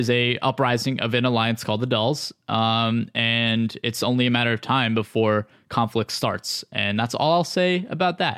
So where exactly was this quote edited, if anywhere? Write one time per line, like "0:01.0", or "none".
none